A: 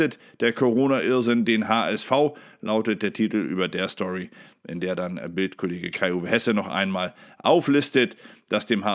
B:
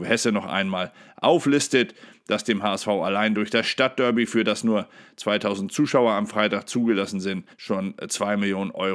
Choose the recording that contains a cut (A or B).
B